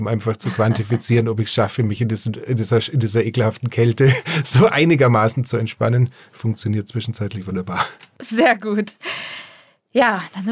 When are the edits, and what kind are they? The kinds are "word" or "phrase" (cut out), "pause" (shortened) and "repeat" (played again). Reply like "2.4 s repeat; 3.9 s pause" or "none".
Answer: none